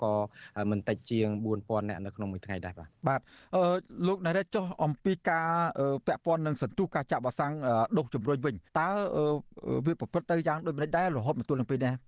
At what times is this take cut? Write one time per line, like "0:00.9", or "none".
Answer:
0:03.0
0:08.7